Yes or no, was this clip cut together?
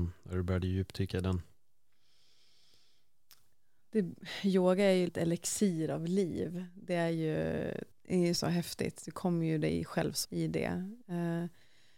yes